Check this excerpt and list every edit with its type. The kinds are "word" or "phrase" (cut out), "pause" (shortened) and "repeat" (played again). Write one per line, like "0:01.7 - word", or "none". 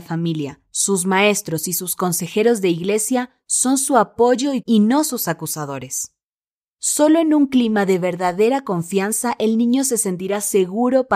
0:04.6 - word